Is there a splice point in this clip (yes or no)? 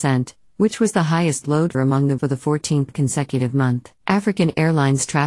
yes